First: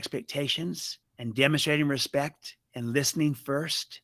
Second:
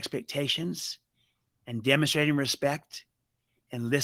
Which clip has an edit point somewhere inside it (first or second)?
first